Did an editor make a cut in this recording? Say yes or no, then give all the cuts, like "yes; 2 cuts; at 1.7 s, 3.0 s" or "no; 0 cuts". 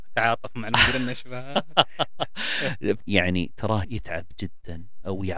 yes; 2 cuts; at 3.0 s, 3.8 s